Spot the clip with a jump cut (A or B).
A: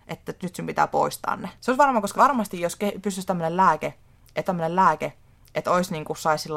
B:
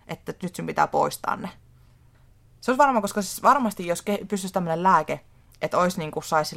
A